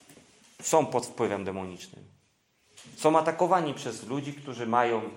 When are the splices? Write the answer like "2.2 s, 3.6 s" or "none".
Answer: none

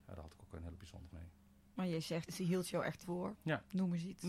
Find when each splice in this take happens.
1.1 s, 2.3 s, 3.0 s

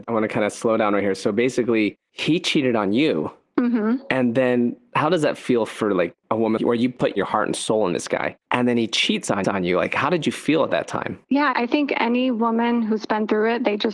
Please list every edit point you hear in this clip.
6.6 s, 8.4 s, 9.4 s, 11.2 s

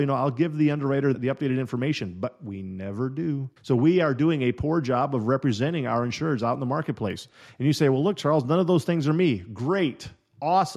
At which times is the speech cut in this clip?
1.1 s, 3.6 s

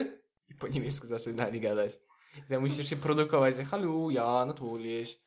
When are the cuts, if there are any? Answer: none

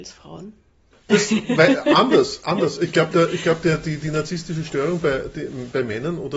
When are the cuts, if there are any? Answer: none

